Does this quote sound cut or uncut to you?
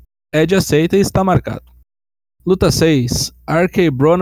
uncut